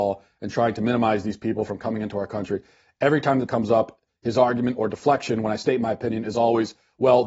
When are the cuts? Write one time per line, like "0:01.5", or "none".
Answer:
0:03.5